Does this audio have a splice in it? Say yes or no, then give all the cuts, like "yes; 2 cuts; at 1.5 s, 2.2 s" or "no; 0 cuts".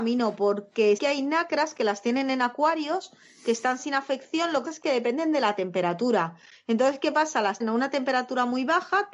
yes; 3 cuts; at 1.0 s, 4.6 s, 7.6 s